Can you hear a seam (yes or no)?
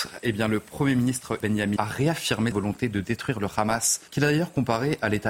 yes